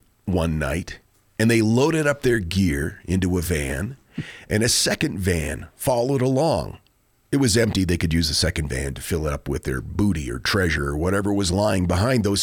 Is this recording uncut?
yes; 0 cuts

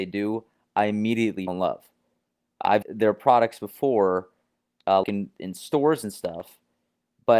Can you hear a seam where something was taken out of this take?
yes; 3 cuts; at 1.5 s, 2.8 s, 5.0 s

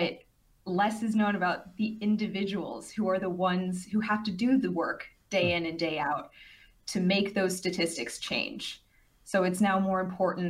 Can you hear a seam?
no; 0 cuts

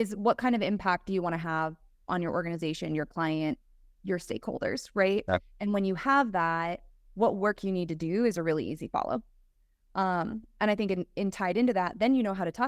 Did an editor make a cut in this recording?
no; 0 cuts

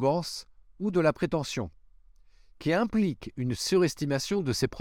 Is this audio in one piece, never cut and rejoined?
yes; 0 cuts

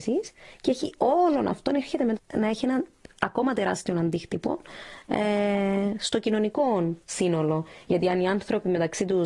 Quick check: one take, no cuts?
no; 1 cut; at 2.2 s

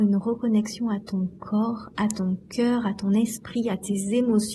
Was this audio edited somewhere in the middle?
no; 0 cuts

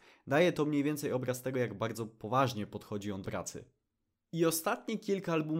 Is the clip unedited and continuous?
no; 1 cut; at 3.2 s

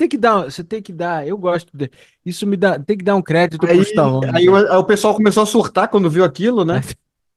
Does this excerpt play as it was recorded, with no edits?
yes; 0 cuts

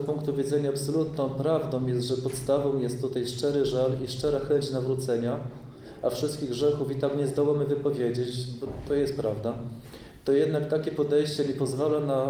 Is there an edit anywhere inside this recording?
no; 0 cuts

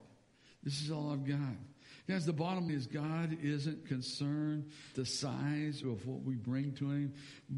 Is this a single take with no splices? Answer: no; 3 cuts; at 2.7 s, 4.9 s, 5.8 s

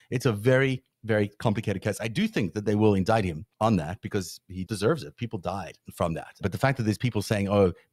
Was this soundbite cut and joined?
yes; 2 cuts; at 3.5 s, 4.7 s

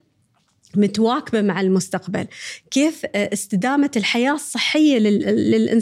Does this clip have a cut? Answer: no; 0 cuts

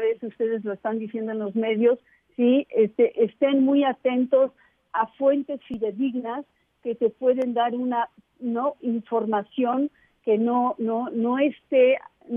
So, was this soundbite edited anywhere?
no; 0 cuts

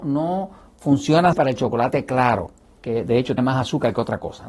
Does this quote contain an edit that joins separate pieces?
yes; 3 cuts; at 1.3 s, 2.7 s, 3.4 s

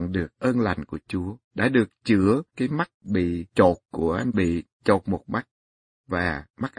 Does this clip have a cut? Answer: yes; 2 cuts; at 1.4 s, 4.3 s

